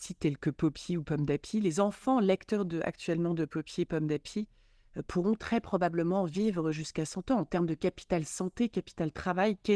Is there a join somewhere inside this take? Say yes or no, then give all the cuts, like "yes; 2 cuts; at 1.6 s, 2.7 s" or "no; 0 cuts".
no; 0 cuts